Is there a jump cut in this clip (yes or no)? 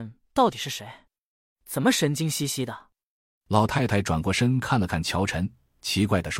no